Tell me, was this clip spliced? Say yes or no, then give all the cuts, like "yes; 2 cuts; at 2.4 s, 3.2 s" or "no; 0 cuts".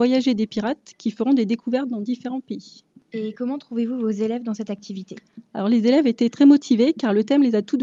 no; 0 cuts